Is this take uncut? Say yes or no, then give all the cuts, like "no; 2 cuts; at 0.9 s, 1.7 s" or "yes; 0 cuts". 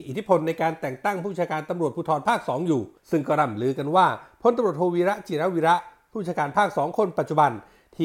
no; 1 cut; at 3.0 s